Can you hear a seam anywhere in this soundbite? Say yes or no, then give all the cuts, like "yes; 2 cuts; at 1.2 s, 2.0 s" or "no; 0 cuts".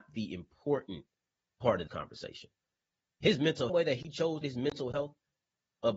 yes; 3 cuts; at 1.9 s, 3.7 s, 4.4 s